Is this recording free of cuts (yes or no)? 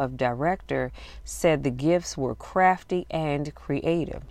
yes